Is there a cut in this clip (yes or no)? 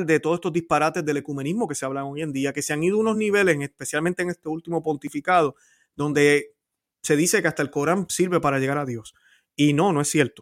no